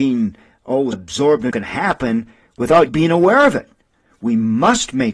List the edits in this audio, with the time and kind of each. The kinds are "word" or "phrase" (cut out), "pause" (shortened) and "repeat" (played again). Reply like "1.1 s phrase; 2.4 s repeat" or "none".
0.9 s word; 1.5 s word; 2.9 s word

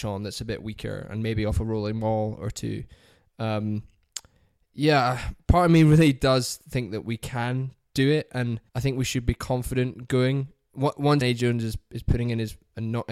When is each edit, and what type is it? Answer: 8.7 s pause; 11.2 s word

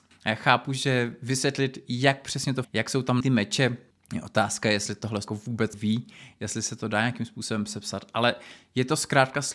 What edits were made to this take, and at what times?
2.6 s word; 3.2 s word; 5.3 s word; 5.7 s word

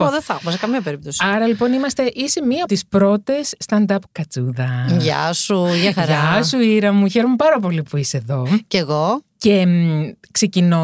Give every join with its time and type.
2.7 s word; 4.1 s phrase

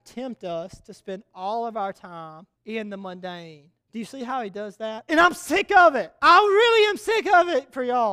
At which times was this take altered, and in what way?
2.5 s pause; 3.8 s pause; 6.2 s pause

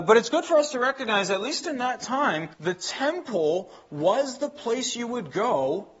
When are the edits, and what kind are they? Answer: 2.5 s pause

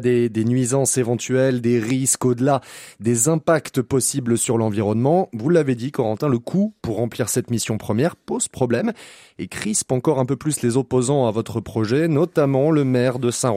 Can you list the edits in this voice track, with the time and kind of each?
none

